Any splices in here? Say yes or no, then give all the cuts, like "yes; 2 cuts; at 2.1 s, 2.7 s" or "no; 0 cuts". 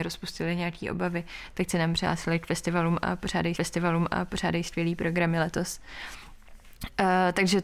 yes; 1 cut; at 3.6 s